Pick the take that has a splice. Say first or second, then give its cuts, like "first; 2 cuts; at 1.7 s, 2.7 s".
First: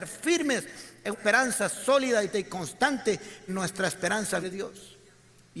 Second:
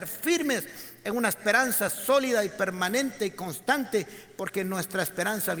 first; 4 cuts; at 1.1 s, 2.3 s, 3.5 s, 4.4 s